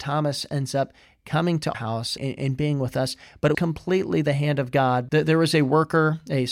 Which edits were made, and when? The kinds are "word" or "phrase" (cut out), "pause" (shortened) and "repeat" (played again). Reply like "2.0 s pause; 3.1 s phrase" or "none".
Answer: 1.7 s word; 2.2 s word; 3.5 s word; 5.1 s word